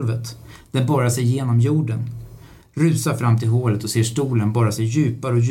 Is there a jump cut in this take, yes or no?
no